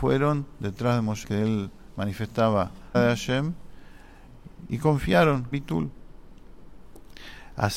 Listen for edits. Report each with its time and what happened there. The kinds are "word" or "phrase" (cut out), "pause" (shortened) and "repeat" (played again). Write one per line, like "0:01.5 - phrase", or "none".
0:01.2 - word
0:02.9 - phrase
0:05.5 - word